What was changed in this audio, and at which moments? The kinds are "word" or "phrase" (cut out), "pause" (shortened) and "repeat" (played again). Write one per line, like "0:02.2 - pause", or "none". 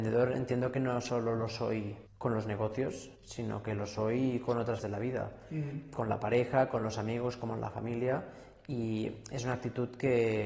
0:02.1 - pause
0:03.2 - pause
0:04.8 - word